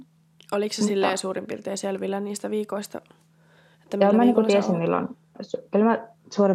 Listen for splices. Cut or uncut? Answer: uncut